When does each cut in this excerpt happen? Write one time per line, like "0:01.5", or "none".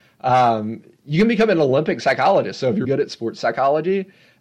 0:02.8